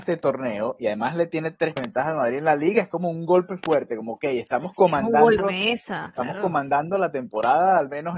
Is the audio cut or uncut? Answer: cut